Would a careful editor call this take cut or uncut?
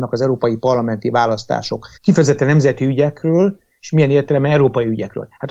cut